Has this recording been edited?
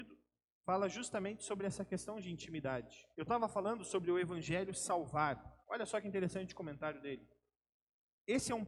yes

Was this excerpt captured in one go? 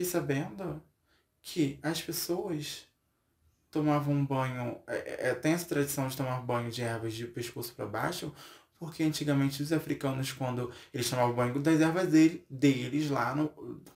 yes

